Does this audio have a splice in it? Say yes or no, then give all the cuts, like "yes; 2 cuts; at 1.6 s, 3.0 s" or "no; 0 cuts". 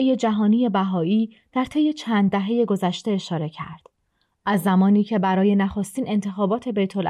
no; 0 cuts